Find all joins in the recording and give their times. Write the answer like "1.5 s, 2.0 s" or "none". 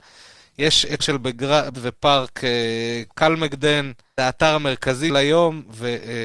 1.0 s, 1.7 s, 4.2 s, 5.1 s